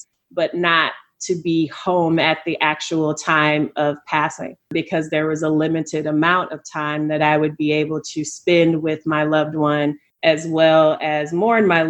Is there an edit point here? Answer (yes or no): yes